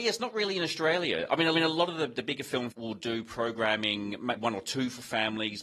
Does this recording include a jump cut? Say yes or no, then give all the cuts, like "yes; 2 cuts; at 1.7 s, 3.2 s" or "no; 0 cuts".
yes; 3 cuts; at 1.5 s, 2.7 s, 4.4 s